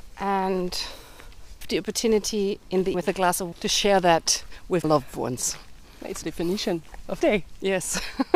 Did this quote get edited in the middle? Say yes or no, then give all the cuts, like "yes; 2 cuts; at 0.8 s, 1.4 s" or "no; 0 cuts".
yes; 6 cuts; at 1.6 s, 2.9 s, 3.5 s, 4.8 s, 6.2 s, 7.2 s